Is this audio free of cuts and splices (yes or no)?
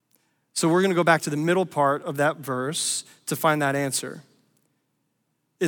yes